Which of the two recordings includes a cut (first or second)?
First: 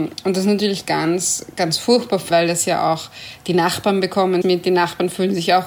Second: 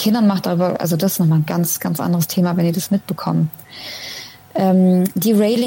first